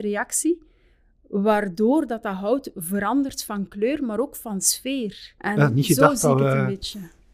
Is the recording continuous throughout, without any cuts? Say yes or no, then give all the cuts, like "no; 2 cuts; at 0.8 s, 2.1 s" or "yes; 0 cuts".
yes; 0 cuts